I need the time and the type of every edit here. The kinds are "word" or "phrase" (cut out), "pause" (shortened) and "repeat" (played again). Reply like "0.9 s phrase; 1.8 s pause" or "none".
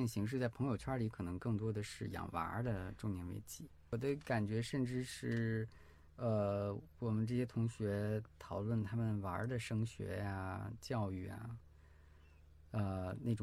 none